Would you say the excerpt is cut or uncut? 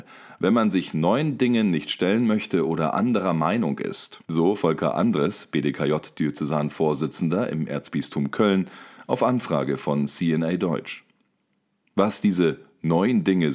cut